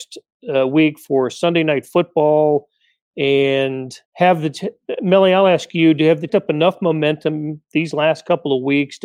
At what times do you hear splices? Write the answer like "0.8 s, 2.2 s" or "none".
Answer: 4.1 s, 6.3 s